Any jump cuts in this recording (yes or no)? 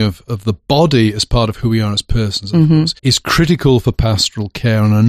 yes